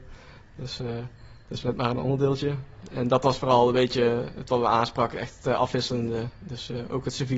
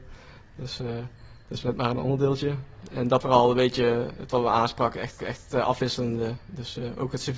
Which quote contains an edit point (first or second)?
second